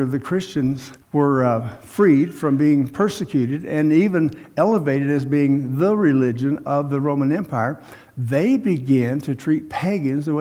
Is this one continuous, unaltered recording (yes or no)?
no